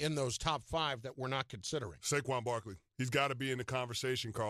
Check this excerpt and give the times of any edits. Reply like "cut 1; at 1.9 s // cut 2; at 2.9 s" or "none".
cut 1; at 2.9 s